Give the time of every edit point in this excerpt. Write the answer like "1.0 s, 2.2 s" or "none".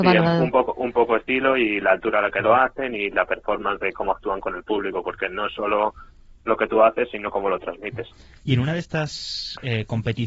none